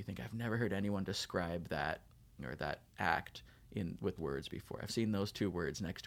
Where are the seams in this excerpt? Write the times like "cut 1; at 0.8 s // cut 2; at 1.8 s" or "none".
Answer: cut 1; at 2.4 s // cut 2; at 2.9 s // cut 3; at 4.2 s // cut 4; at 4.9 s